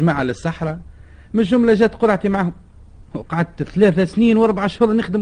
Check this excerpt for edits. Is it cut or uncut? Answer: cut